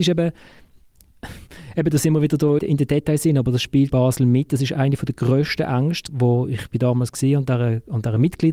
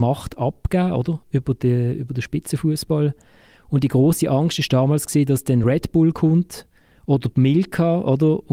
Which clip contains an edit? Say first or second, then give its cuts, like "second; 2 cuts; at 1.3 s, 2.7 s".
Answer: first; 3 cuts; at 2.6 s, 3.9 s, 6.1 s